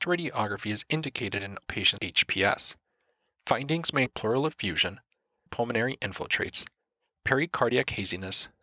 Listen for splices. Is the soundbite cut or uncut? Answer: cut